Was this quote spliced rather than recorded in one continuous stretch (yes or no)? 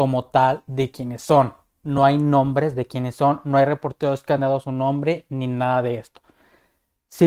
no